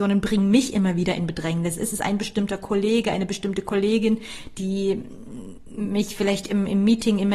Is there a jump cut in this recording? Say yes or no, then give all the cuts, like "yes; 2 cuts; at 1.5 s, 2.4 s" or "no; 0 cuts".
no; 0 cuts